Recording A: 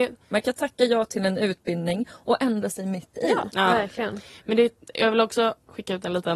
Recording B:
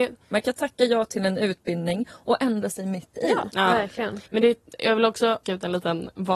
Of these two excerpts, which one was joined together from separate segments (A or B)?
B